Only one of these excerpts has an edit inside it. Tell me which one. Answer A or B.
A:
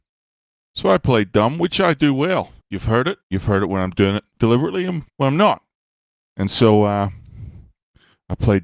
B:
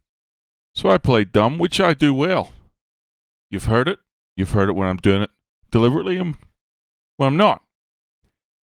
A